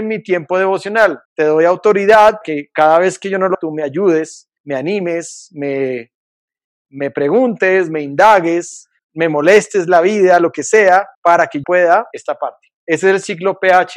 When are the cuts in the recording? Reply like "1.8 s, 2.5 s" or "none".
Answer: 1.2 s, 2.4 s, 3.5 s, 4.6 s, 9.0 s, 11.1 s, 11.6 s, 12.1 s, 12.8 s